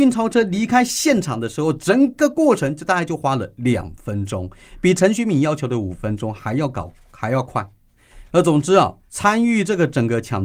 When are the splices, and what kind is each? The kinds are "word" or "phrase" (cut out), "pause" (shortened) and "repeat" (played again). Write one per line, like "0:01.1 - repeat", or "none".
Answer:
0:09.0 - pause